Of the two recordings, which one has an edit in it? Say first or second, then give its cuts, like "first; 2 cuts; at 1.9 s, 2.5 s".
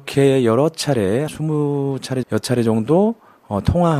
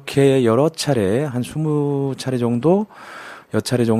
first; 2 cuts; at 1.3 s, 2.2 s